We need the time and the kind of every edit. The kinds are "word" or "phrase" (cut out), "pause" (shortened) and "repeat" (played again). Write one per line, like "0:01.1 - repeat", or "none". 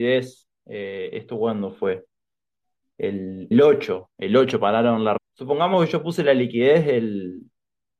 0:03.5 - word
0:05.2 - word